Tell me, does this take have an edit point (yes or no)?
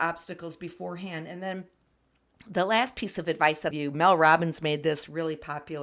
yes